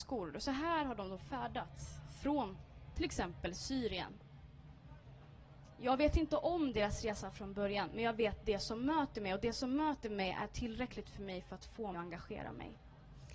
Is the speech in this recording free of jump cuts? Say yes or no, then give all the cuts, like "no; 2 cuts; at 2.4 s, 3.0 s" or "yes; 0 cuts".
no; 1 cut; at 11.9 s